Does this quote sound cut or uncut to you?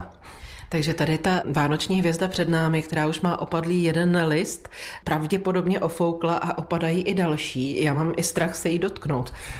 uncut